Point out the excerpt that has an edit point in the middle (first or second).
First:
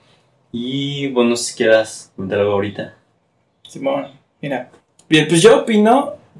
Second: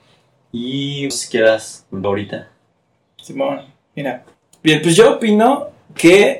second